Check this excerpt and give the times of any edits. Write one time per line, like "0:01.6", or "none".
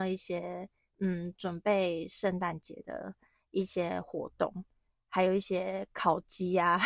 none